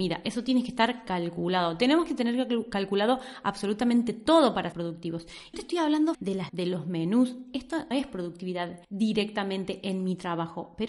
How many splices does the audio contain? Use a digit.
6